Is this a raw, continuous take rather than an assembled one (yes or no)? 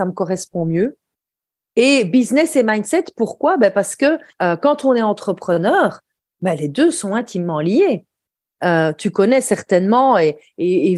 yes